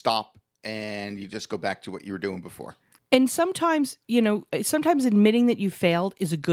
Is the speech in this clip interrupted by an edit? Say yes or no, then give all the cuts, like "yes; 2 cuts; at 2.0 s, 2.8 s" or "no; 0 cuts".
yes; 1 cut; at 3.0 s